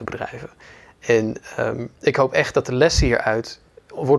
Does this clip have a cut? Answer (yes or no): no